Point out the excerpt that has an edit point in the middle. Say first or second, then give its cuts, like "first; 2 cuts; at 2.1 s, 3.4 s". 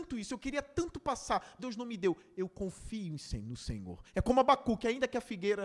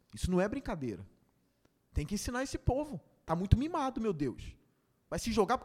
first; 1 cut; at 1.6 s